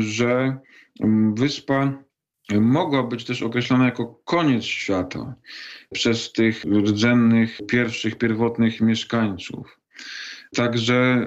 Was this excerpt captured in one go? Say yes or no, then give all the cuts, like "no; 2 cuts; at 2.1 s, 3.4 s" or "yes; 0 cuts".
yes; 0 cuts